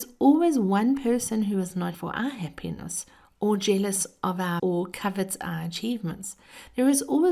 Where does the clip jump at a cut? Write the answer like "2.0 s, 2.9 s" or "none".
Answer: 1.9 s, 4.6 s